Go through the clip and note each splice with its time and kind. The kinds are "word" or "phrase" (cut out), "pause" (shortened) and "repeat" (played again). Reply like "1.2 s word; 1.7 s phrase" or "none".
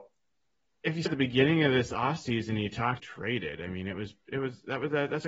1.1 s word; 3.0 s phrase